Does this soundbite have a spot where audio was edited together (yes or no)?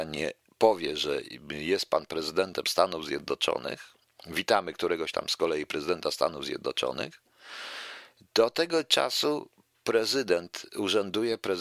no